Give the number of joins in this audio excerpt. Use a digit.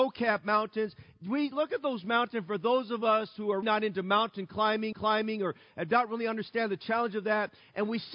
2